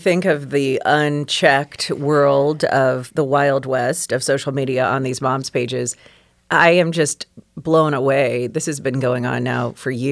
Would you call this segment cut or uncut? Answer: uncut